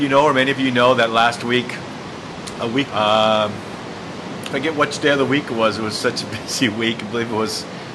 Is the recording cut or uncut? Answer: cut